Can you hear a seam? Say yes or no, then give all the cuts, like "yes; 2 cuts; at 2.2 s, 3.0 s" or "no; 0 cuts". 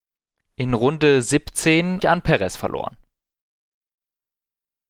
yes; 1 cut; at 2.0 s